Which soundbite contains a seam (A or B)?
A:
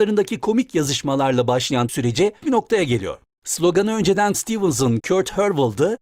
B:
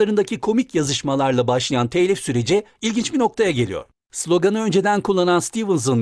A